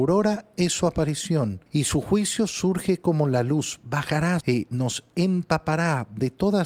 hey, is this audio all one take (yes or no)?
no